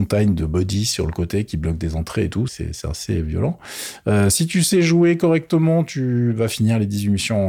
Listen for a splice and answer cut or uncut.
cut